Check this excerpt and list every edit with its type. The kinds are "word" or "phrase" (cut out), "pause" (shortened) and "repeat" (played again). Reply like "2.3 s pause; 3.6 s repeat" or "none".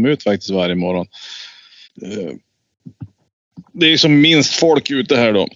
1.8 s pause